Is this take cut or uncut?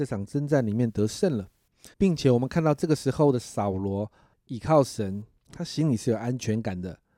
cut